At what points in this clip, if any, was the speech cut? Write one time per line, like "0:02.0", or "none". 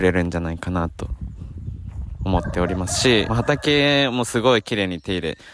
0:03.3